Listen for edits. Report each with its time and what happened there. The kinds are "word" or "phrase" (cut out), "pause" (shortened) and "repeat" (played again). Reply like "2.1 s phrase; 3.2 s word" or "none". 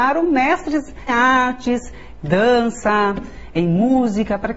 1.1 s word; 2.2 s phrase